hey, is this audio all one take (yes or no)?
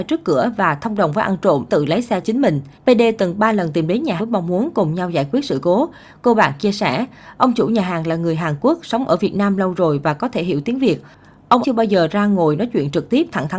no